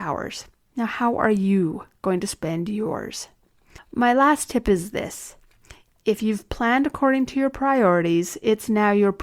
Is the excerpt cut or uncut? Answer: uncut